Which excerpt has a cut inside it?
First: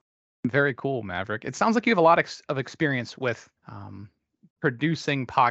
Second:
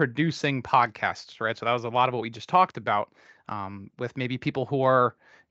first; 1 cut; at 3.6 s

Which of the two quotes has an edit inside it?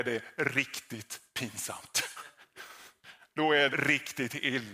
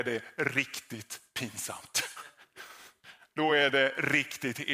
first; 1 cut; at 3.7 s

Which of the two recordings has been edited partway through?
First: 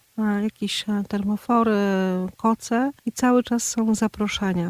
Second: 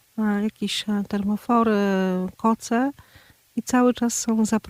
first; 1 cut; at 3.0 s

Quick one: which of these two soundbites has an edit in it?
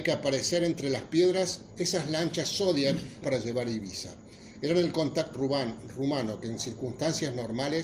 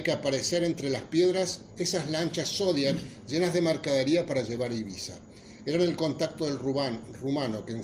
first; 2 cuts; at 3.2 s, 5.3 s

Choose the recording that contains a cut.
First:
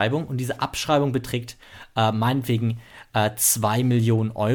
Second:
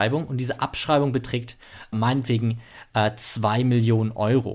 second; 1 cut; at 1.9 s

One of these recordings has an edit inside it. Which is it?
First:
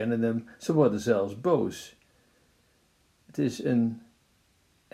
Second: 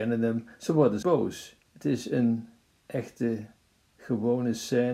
second; 3 cuts; at 1.0 s, 1.6 s, 2.6 s

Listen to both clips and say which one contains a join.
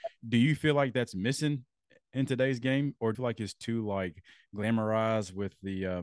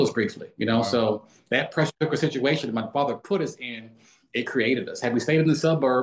first; 1 cut; at 3.1 s

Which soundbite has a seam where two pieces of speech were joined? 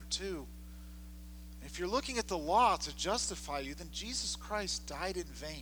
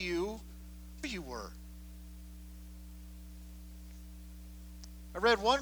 second; 1 cut; at 1.0 s

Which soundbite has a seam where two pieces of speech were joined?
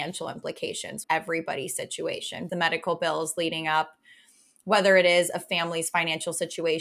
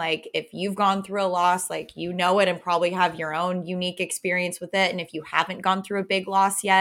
first; 2 cuts; at 1.0 s, 2.5 s

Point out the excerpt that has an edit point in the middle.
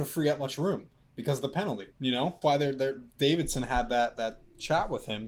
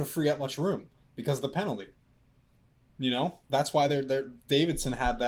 first; 2 cuts; at 1.9 s, 2.4 s

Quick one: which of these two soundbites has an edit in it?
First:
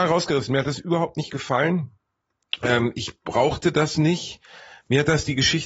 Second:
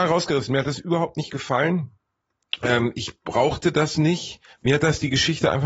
second; 1 cut; at 4.5 s

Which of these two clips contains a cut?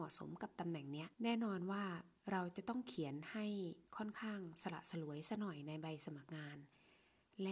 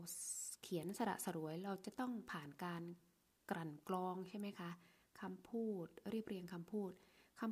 first; 3 cuts; at 1.1 s, 2.2 s, 3.9 s

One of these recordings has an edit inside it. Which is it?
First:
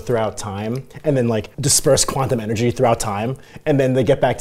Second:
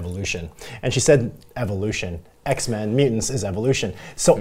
first; 1 cut; at 1.5 s

